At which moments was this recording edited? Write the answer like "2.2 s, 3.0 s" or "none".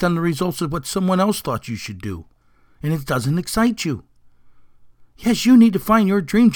3.1 s